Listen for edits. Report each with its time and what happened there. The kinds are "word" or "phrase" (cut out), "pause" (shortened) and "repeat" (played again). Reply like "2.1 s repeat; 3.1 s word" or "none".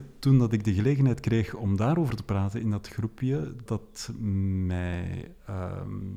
3.7 s word